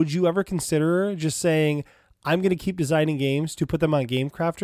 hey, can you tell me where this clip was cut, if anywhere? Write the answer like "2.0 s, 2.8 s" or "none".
none

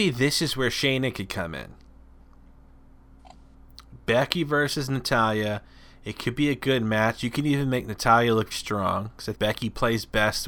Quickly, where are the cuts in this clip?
8.5 s, 9.3 s

